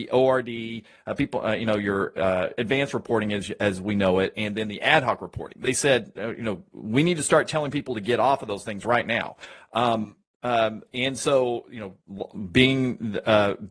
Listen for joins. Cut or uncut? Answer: uncut